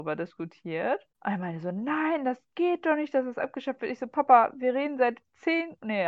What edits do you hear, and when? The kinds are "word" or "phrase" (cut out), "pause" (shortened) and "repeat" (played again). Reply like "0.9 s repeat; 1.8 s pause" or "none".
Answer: 1.1 s pause